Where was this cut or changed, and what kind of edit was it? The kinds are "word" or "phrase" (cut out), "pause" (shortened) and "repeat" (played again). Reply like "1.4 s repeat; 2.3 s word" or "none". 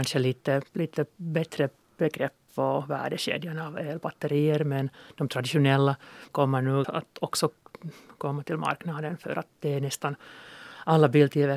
6.3 s word; 6.8 s word